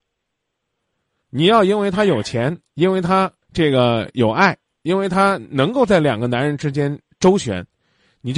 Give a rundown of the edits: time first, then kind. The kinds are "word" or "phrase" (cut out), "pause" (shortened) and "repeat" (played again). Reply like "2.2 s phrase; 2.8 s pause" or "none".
3.4 s pause; 4.8 s pause